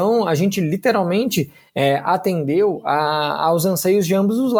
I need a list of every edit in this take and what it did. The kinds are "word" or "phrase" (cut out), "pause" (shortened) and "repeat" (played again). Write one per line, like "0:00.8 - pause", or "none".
none

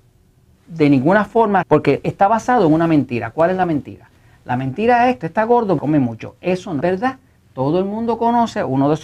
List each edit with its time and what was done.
0:01.6 - word
0:05.2 - word
0:05.8 - word
0:06.8 - word

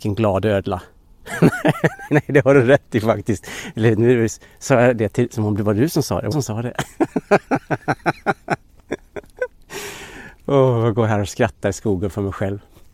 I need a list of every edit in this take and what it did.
0:02.1 - word
0:06.3 - word

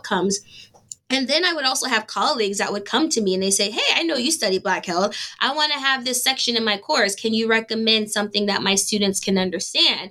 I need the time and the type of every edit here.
none

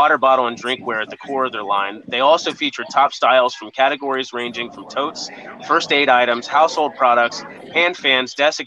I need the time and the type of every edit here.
none

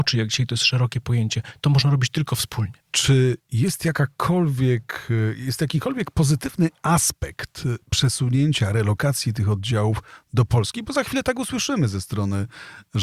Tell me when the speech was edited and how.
0:02.8 - pause

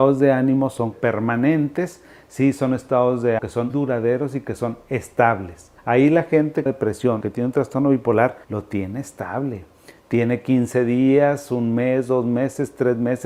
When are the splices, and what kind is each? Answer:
0:00.9 - word
0:03.4 - word
0:03.7 - word
0:05.8 - pause
0:06.7 - phrase
0:07.2 - word
0:08.4 - pause

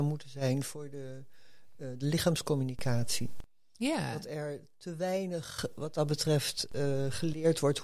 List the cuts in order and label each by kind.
none

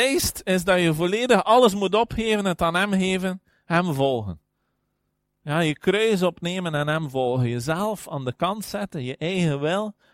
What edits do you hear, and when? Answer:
none

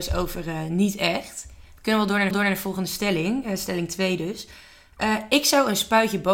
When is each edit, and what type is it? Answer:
0:02.3 - repeat

